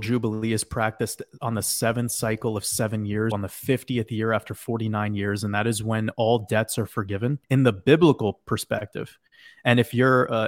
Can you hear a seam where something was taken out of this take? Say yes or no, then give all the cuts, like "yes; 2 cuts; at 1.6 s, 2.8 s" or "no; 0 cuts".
yes; 2 cuts; at 3.3 s, 7.4 s